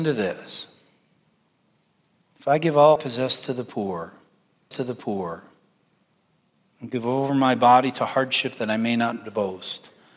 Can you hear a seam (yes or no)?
yes